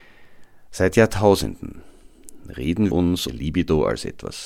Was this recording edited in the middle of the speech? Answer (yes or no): yes